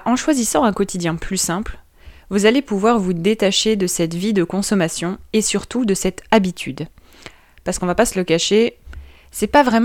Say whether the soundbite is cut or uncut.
uncut